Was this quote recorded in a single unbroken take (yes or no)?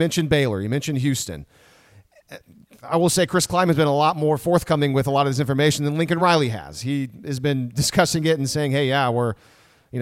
yes